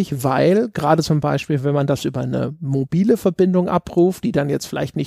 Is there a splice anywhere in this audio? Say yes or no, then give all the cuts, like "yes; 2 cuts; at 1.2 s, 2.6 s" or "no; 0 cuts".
no; 0 cuts